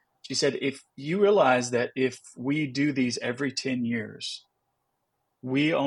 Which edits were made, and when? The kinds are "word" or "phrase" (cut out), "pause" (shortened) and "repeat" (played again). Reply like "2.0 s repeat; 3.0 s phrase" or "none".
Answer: none